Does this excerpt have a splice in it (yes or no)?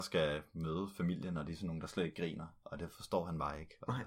no